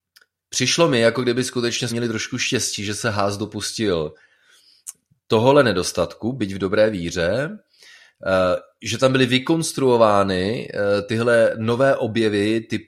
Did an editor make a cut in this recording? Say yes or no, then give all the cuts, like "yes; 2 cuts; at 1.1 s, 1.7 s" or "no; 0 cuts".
yes; 1 cut; at 1.9 s